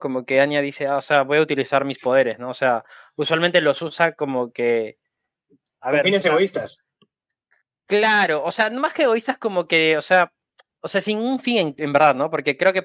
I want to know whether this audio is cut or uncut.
uncut